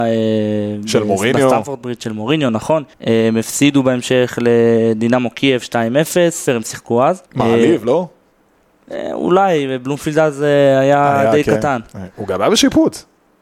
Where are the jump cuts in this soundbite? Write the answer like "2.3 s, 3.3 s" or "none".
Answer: 2.9 s, 6.5 s, 7.3 s